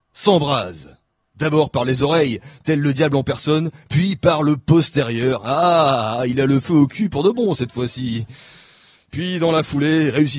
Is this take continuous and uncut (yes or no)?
yes